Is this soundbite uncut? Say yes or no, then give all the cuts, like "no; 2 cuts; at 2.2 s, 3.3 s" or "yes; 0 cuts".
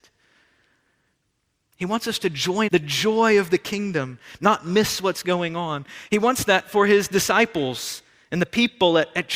no; 1 cut; at 2.7 s